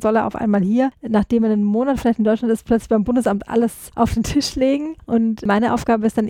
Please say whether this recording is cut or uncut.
uncut